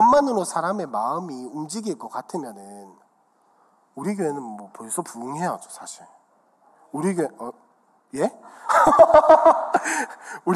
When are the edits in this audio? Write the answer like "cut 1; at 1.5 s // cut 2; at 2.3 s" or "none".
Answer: none